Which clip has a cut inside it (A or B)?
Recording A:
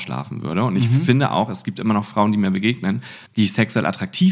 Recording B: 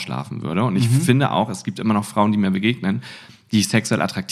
A